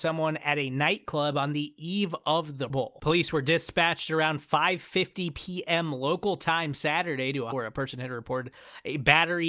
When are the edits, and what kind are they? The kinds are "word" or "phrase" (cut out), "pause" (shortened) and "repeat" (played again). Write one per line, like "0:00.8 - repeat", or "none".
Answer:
0:02.7 - word
0:07.5 - word